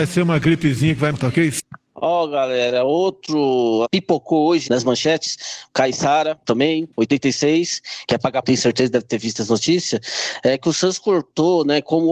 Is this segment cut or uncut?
cut